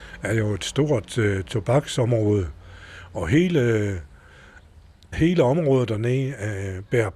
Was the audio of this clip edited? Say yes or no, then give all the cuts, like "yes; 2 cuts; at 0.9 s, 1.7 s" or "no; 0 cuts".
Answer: yes; 1 cut; at 5.1 s